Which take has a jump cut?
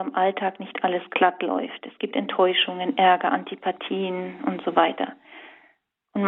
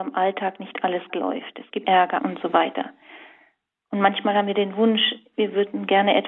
second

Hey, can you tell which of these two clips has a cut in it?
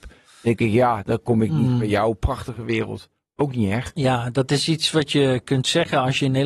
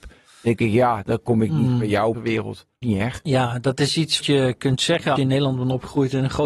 second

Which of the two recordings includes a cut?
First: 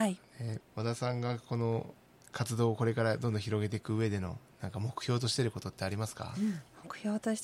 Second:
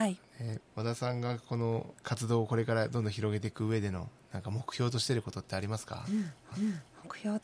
second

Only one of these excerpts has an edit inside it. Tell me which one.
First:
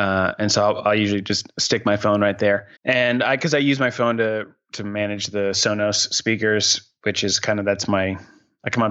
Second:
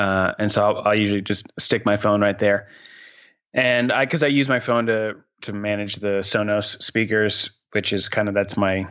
first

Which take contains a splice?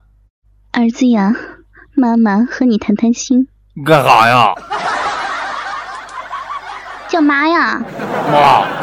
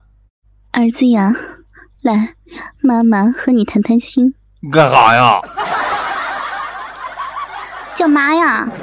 first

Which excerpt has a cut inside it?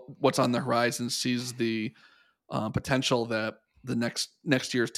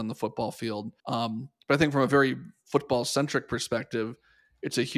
second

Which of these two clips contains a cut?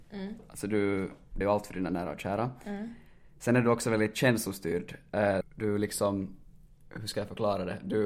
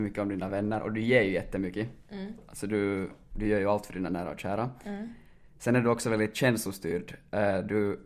first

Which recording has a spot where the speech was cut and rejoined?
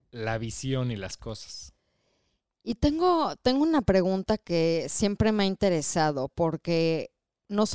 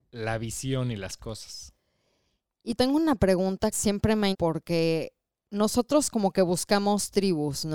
second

